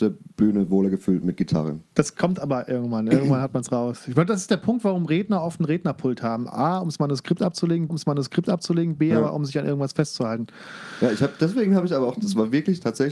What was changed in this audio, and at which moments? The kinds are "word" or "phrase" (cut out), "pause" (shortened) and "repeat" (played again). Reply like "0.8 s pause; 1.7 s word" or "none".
7.9 s repeat